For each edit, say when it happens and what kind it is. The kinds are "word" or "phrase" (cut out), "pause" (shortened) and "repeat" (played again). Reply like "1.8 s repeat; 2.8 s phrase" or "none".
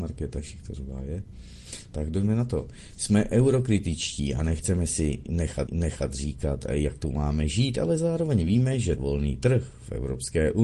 5.7 s repeat; 9.0 s word